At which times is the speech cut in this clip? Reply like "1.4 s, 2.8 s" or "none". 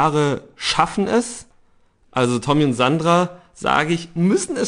none